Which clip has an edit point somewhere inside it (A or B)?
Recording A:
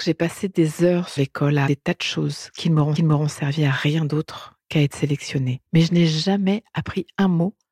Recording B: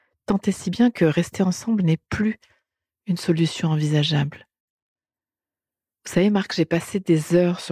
A